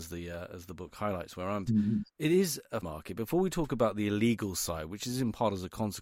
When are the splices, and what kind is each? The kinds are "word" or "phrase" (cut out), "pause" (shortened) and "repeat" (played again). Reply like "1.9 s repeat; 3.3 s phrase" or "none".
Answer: 1.7 s word; 2.1 s pause; 2.8 s word